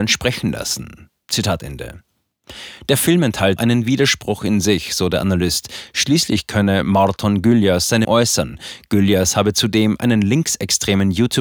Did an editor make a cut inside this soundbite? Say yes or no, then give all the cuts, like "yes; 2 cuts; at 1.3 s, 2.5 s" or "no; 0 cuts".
yes; 2 cuts; at 3.6 s, 8.0 s